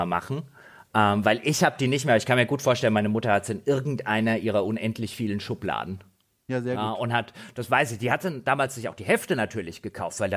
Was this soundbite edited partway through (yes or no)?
no